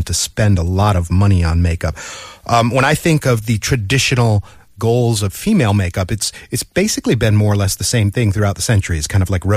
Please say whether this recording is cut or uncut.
uncut